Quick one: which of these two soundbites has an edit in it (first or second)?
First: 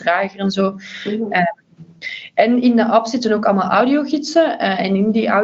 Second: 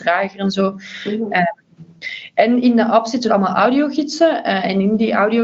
second